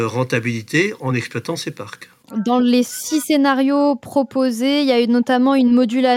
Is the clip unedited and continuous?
yes; 0 cuts

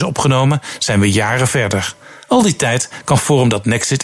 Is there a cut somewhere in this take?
no; 0 cuts

